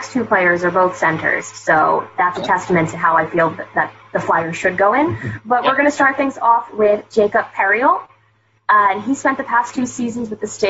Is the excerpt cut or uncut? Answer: uncut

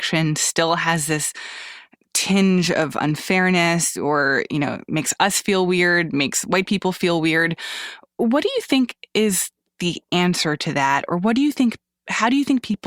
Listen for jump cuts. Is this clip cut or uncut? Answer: uncut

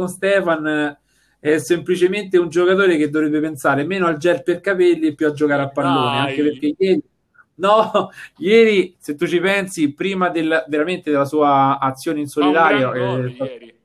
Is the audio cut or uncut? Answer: uncut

